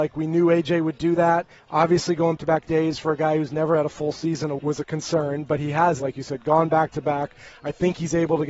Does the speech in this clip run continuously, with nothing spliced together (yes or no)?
no